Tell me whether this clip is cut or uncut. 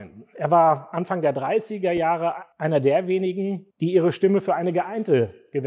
cut